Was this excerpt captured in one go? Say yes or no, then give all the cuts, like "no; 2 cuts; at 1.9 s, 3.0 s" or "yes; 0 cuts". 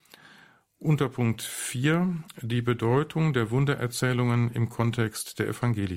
yes; 0 cuts